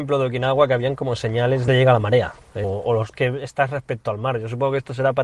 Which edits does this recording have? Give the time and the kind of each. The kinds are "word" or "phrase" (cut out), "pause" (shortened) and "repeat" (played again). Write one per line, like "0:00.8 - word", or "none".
0:01.7 - phrase
0:02.6 - word
0:03.1 - word